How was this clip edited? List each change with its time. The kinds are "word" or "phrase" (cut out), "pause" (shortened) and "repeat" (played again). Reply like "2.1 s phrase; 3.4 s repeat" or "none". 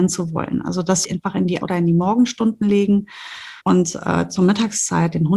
1.0 s phrase; 1.6 s word; 3.6 s pause